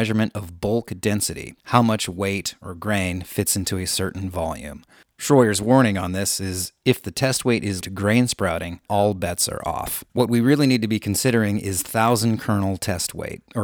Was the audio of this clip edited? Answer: yes; 5 cuts; at 1.6 s, 5.0 s, 7.8 s, 8.9 s, 10.1 s

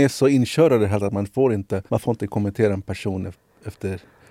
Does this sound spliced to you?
yes; 2 cuts; at 1.0 s, 1.9 s

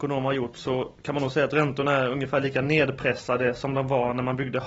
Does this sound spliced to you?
no; 0 cuts

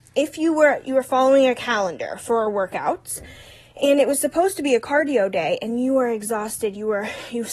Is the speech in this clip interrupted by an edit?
no; 0 cuts

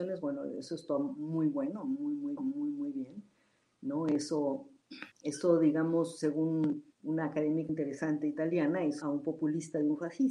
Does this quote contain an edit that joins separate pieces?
yes; 5 cuts; at 2.4 s, 5.1 s, 6.9 s, 7.7 s, 9.0 s

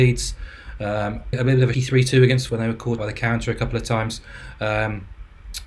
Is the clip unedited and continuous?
no; 4 cuts; at 1.3 s, 1.7 s, 2.5 s, 3.0 s

